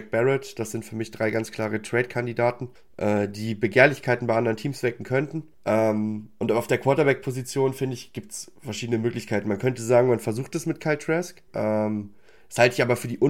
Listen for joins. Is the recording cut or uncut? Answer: cut